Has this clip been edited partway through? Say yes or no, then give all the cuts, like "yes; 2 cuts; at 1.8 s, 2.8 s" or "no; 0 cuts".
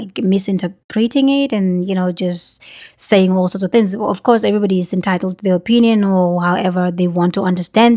no; 0 cuts